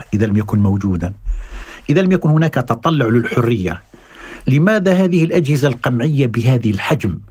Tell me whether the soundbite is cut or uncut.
uncut